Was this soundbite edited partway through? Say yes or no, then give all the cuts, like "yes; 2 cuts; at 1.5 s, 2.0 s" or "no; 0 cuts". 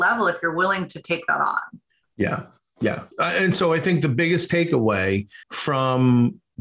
yes; 2 cuts; at 3.1 s, 5.4 s